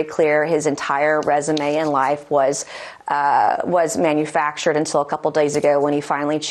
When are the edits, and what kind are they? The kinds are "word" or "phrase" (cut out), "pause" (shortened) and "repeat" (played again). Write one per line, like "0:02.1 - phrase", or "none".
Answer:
none